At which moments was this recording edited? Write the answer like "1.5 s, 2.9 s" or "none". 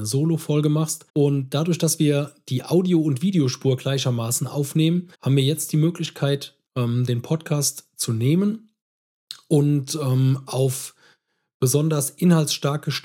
1.1 s, 5.1 s, 6.7 s